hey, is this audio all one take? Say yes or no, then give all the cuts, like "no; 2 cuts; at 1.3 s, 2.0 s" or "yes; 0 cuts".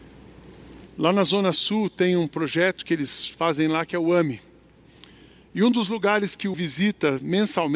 no; 1 cut; at 6.5 s